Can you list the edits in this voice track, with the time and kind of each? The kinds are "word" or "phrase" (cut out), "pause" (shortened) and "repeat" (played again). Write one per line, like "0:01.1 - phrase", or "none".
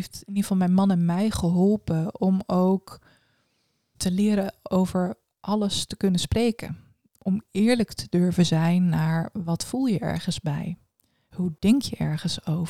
none